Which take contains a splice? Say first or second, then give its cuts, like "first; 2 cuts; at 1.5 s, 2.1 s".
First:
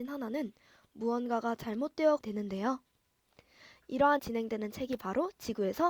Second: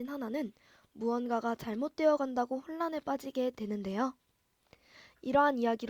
first; 2 cuts; at 2.2 s, 4.2 s